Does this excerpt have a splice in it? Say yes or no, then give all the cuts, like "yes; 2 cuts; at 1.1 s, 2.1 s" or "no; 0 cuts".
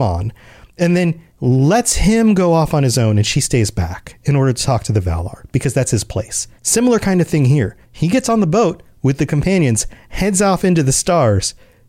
yes; 3 cuts; at 1.3 s, 6.6 s, 7.8 s